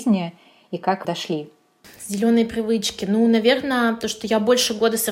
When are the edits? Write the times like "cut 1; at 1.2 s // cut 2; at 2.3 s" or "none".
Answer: cut 1; at 1.0 s